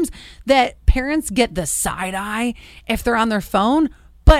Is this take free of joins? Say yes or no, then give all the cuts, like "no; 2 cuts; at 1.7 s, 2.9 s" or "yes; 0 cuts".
yes; 0 cuts